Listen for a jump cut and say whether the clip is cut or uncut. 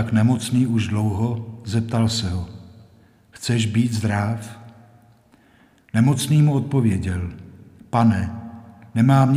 uncut